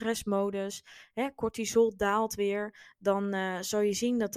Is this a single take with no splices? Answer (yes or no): yes